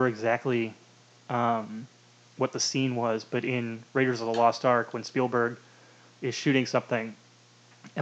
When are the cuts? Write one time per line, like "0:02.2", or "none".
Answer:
none